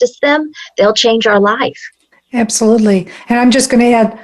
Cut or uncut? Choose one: cut